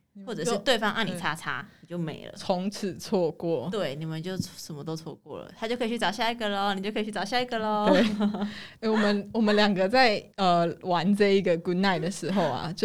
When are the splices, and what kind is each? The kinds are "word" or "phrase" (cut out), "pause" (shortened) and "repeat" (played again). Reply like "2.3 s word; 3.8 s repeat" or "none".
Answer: 10.3 s pause